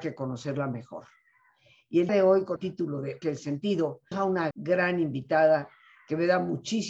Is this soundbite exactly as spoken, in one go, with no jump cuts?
no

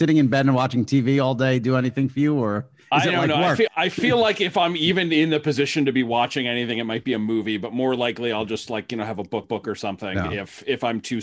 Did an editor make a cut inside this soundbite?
yes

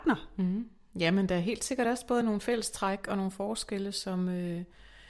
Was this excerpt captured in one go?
yes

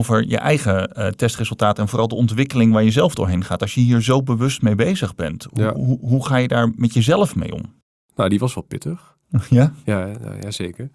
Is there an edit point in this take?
no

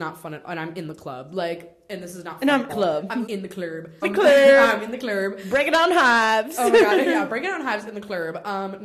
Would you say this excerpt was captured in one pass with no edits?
no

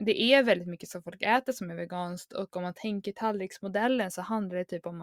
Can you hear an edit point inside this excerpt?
no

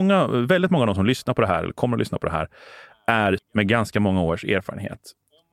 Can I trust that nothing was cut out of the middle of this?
no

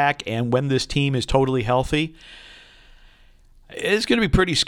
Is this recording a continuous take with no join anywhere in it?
yes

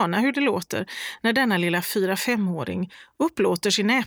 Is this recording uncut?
yes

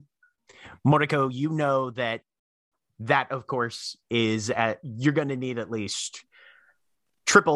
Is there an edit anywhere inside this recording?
no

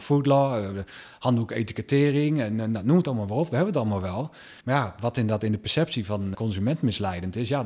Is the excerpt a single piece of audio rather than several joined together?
no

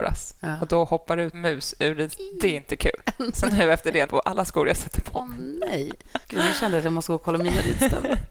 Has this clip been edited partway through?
yes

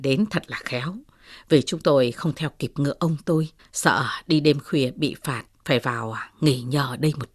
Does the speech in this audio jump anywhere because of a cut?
yes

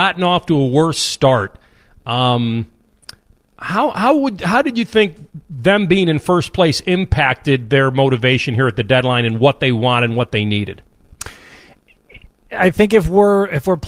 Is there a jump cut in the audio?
no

